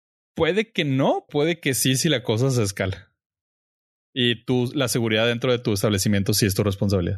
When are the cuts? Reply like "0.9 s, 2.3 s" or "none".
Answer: 1.3 s